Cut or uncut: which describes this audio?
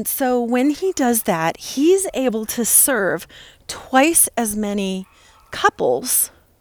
uncut